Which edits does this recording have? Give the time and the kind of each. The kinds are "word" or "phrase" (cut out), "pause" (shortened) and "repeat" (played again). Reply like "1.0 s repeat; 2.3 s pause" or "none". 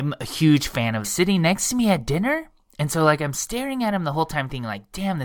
1.0 s phrase